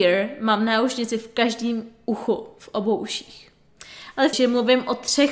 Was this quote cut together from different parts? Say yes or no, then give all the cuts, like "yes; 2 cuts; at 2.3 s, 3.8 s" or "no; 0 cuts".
yes; 1 cut; at 4.3 s